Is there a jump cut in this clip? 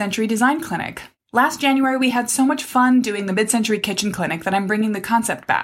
no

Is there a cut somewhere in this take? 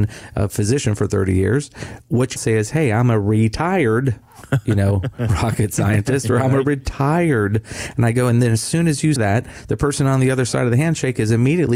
yes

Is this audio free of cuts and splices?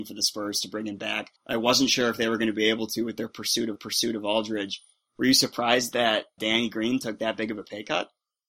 no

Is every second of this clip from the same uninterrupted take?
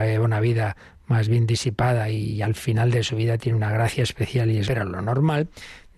no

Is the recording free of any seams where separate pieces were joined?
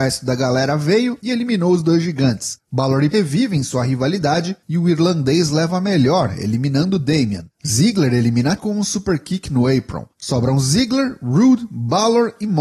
no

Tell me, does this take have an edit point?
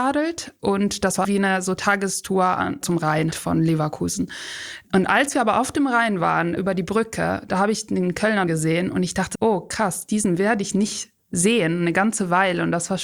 yes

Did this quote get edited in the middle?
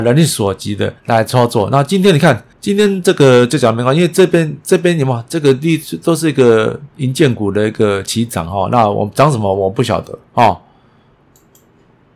yes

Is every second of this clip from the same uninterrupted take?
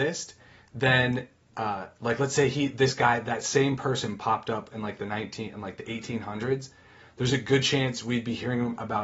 yes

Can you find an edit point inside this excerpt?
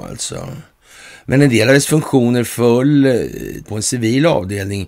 yes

